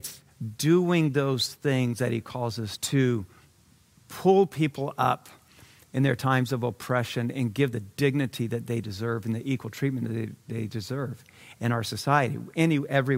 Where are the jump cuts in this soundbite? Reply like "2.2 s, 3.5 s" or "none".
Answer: 2.8 s, 7.7 s